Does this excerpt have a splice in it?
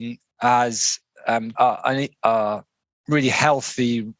yes; 1 cut; at 1.5 s

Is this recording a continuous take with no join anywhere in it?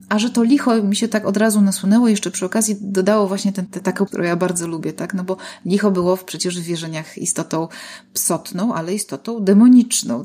no; 2 cuts; at 3.7 s, 4.1 s

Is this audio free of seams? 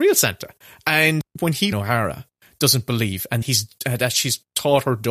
no; 2 cuts; at 1.7 s, 3.4 s

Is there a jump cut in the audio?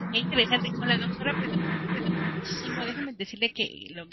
yes; 1 cut; at 1.9 s

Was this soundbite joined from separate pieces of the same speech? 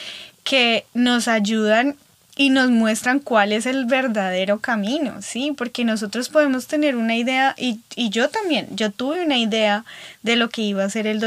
no; 0 cuts

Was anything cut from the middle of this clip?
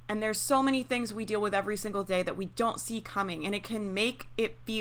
no; 0 cuts

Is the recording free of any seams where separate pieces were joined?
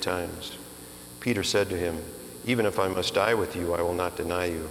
yes; 0 cuts

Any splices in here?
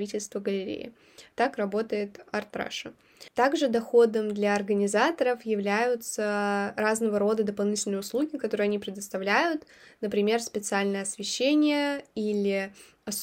no; 0 cuts

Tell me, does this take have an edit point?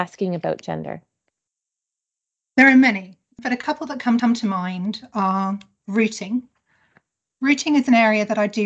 yes; 1 cut; at 4.2 s

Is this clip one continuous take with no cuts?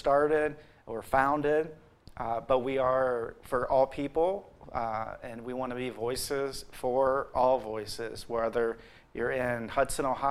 yes; 0 cuts

